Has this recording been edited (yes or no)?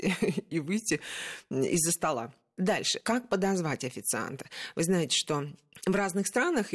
no